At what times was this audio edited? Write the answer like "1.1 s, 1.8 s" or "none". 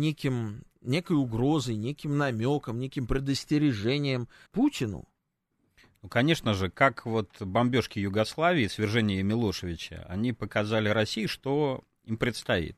4.5 s